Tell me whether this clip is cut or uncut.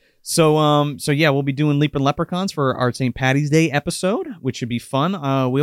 uncut